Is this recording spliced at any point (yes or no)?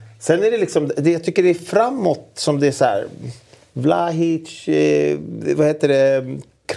no